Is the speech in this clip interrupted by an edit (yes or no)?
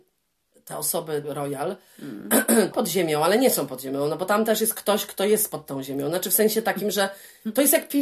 yes